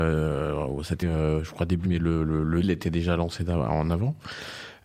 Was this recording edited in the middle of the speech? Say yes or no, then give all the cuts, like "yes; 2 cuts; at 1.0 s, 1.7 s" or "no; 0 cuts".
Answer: yes; 3 cuts; at 1.0 s, 1.8 s, 2.6 s